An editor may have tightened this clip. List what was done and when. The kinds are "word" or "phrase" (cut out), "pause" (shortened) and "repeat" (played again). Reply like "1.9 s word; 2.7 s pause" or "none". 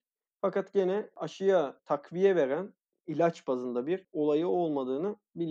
none